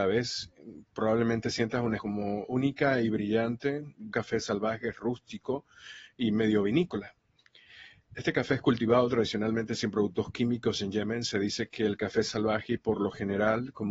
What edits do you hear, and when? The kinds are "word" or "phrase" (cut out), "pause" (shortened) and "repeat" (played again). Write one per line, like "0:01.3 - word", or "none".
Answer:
0:02.0 - word
0:04.1 - word